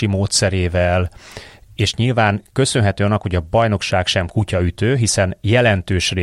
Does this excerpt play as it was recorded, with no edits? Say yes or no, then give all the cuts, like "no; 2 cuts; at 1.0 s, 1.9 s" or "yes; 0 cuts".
yes; 0 cuts